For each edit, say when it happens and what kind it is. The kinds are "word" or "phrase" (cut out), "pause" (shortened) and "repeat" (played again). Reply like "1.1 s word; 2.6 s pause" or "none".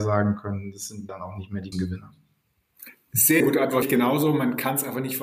1.1 s word; 1.7 s word; 3.4 s word; 3.8 s word